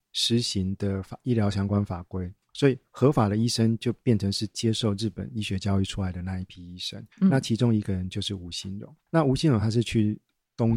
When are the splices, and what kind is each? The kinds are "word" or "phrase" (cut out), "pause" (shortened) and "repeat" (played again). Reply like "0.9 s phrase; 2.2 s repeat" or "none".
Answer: 2.4 s pause; 7.1 s pause; 9.1 s word